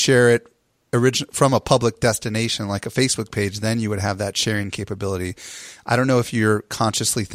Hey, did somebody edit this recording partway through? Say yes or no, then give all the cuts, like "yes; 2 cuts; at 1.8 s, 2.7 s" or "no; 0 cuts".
no; 0 cuts